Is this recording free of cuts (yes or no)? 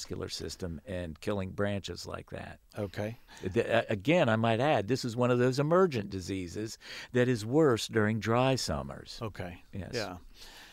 yes